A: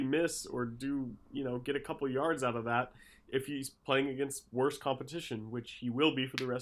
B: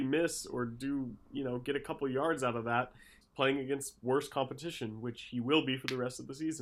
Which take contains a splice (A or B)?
B